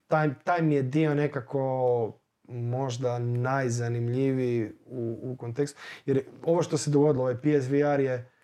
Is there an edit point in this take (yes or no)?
no